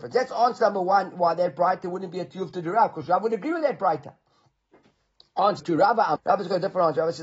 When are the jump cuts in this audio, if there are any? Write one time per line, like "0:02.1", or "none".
0:05.6
0:06.2

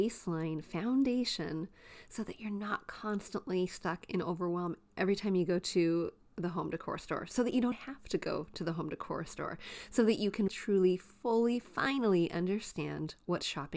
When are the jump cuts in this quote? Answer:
0:07.7
0:10.5

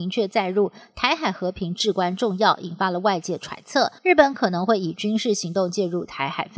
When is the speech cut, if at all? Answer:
0:04.0

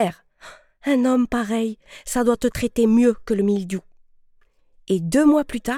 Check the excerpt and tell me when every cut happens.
none

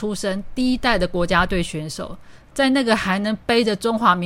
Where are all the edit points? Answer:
0:02.5

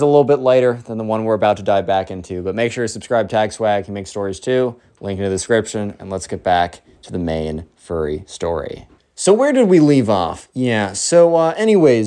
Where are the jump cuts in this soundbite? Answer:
0:09.0

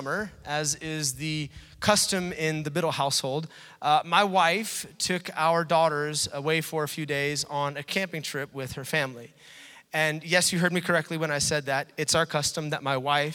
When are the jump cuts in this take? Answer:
none

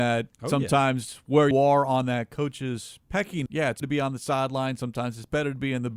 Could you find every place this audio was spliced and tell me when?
0:01.5
0:03.5
0:03.8

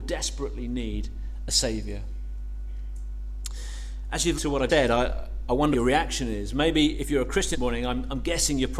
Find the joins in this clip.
0:04.4
0:04.7
0:05.7
0:07.0
0:07.5

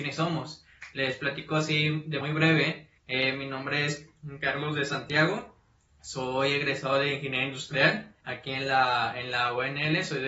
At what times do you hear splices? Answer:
0:02.2
0:03.0
0:05.8
0:08.2

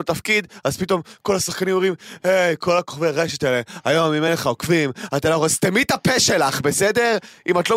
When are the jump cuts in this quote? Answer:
none

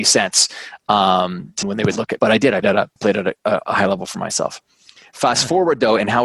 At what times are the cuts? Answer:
0:01.6
0:02.2
0:02.6
0:03.0

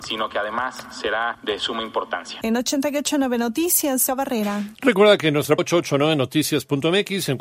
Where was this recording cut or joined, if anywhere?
0:04.1
0:05.6

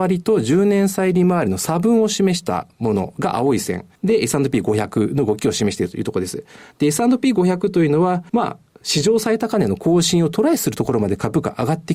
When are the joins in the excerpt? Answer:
0:03.9
0:08.3

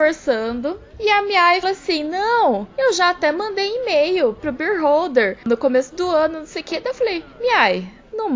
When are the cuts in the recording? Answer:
0:01.6

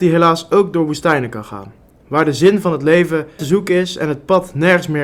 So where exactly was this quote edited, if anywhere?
0:03.4

